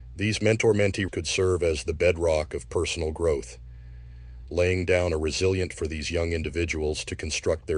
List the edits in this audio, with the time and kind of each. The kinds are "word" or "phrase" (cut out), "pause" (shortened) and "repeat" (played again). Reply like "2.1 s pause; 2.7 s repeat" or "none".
1.1 s word; 5.7 s word